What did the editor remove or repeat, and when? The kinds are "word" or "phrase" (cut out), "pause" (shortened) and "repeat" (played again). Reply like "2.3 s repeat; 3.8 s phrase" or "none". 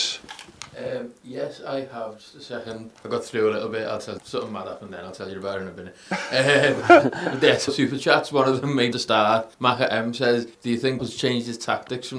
3.0 s pause; 4.2 s word; 7.7 s phrase; 8.9 s phrase; 9.5 s pause; 10.5 s pause; 11.0 s word